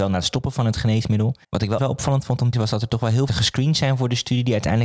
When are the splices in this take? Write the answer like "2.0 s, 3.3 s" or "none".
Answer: 1.4 s, 1.8 s, 2.5 s, 3.3 s